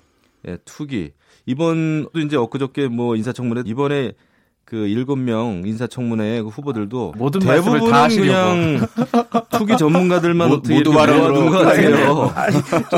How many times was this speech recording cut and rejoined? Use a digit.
3